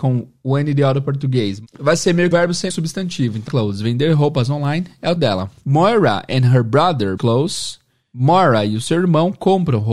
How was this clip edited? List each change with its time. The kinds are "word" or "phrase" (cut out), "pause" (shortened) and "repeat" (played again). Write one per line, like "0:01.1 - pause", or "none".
0:02.3 - phrase
0:02.7 - phrase
0:03.5 - word
0:05.2 - word
0:07.2 - phrase